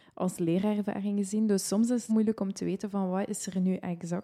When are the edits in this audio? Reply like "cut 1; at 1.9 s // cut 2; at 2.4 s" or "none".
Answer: cut 1; at 2.1 s

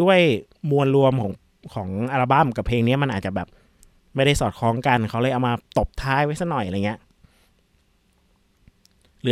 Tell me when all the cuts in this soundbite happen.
none

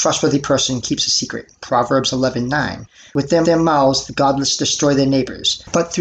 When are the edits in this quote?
cut 1; at 3.4 s

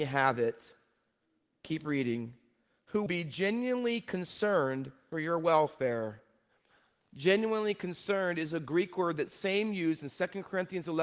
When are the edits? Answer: cut 1; at 3.1 s // cut 2; at 5.1 s

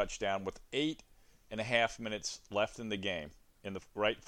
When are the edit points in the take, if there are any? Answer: none

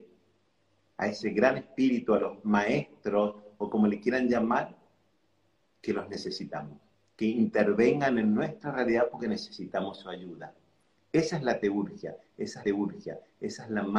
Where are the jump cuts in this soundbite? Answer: cut 1; at 6.9 s // cut 2; at 12.6 s

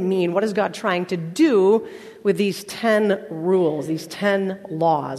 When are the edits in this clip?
none

